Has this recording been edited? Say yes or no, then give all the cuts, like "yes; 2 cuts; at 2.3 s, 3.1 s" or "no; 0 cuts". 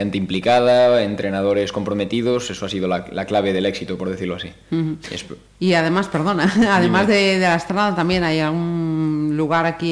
no; 0 cuts